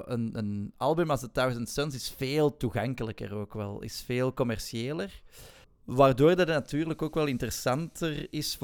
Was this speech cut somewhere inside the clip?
yes; 1 cut; at 5.6 s

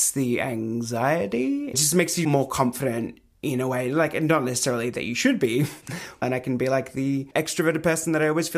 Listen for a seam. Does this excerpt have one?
no; 0 cuts

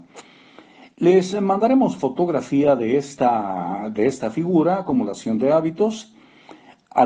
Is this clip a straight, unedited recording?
yes; 0 cuts

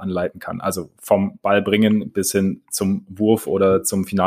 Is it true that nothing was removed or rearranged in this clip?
yes; 0 cuts

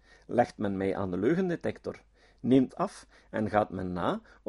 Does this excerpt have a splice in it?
yes; 1 cut; at 2.7 s

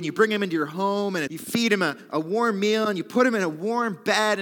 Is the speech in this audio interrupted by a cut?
yes; 1 cut; at 1.3 s

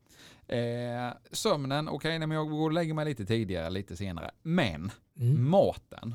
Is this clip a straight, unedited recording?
no; 1 cut; at 1.2 s

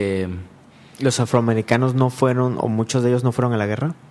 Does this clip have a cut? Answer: no; 0 cuts

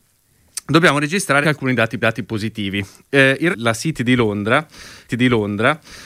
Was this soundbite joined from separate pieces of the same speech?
yes; 4 cuts; at 1.4 s, 2.0 s, 3.5 s, 5.1 s

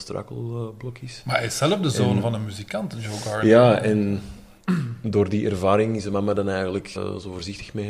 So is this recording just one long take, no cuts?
no; 1 cut; at 7.0 s

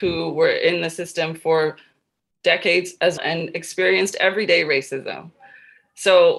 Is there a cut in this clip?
yes; 1 cut; at 3.2 s

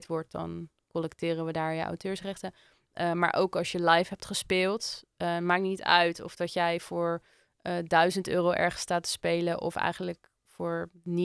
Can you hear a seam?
no; 0 cuts

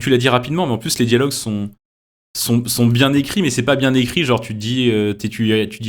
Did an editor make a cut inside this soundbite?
no; 0 cuts

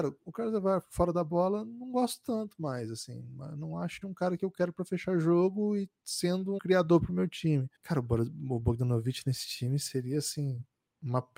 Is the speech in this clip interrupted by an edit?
yes; 3 cuts; at 4.0 s, 6.6 s, 7.8 s

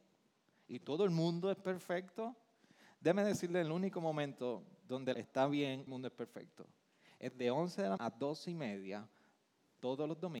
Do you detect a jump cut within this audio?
yes; 3 cuts; at 5.1 s, 5.9 s, 8.0 s

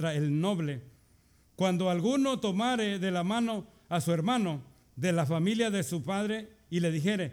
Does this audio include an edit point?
no; 0 cuts

